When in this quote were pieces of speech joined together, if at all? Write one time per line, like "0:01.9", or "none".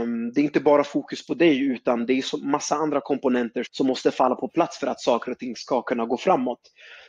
0:03.6